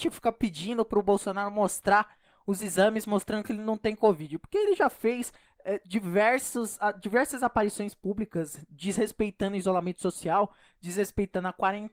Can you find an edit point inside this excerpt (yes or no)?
no